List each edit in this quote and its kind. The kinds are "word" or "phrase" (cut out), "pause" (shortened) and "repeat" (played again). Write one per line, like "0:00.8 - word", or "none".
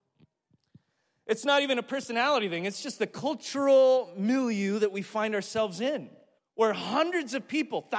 0:06.4 - pause